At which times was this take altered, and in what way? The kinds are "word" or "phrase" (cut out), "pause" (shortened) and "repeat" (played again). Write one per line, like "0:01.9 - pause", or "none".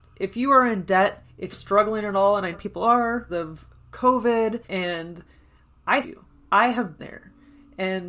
0:01.5 - phrase
0:02.5 - phrase
0:03.3 - word
0:04.6 - pause
0:06.0 - word
0:07.0 - word